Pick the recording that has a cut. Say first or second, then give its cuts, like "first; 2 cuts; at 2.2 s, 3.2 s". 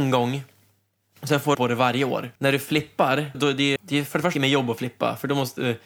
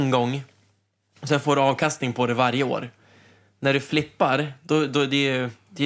first; 5 cuts; at 1.5 s, 2.4 s, 3.3 s, 3.8 s, 4.3 s